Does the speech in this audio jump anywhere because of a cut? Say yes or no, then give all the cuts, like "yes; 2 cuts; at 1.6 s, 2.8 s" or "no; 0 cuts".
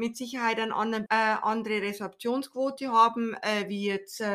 yes; 1 cut; at 1.1 s